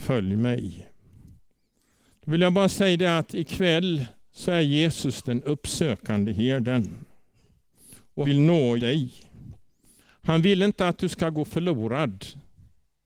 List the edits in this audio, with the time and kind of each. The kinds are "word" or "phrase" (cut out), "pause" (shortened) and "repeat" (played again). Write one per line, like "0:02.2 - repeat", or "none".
0:08.2 - word
0:08.8 - word